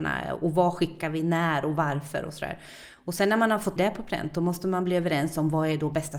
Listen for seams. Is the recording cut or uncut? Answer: cut